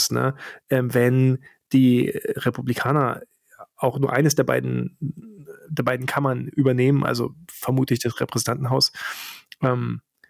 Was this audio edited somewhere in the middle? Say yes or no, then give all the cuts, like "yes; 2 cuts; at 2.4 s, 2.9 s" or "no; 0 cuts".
no; 0 cuts